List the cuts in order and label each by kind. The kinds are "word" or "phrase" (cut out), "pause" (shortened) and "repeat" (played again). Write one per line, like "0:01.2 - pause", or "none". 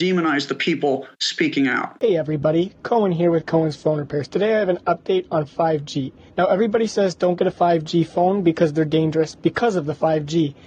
0:06.3 - pause